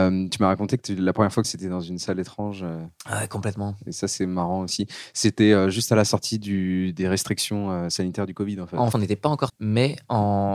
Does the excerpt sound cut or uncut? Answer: cut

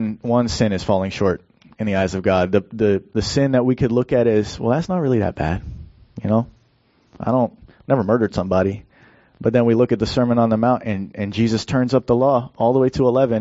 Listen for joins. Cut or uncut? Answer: uncut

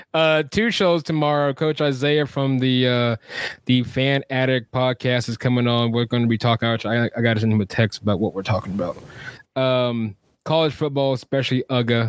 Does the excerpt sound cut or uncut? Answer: uncut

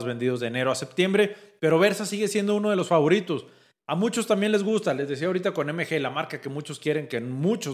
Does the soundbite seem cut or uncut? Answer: uncut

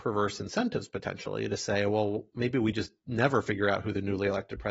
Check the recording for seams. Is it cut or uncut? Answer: uncut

